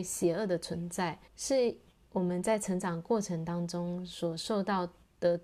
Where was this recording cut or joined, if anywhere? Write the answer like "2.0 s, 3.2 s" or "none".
1.3 s

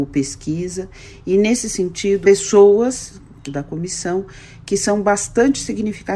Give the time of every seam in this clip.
2.2 s, 3.5 s

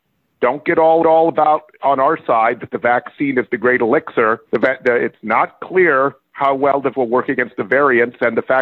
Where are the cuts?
1.0 s, 4.5 s, 6.9 s

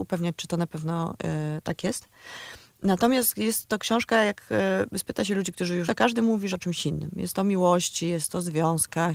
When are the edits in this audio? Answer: 5.9 s, 6.5 s

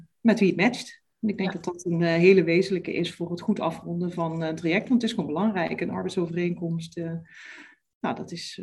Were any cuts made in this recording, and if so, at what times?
none

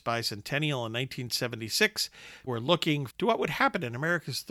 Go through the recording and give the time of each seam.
2.5 s, 3.1 s

